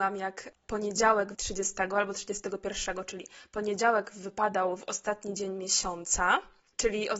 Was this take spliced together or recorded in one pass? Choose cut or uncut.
cut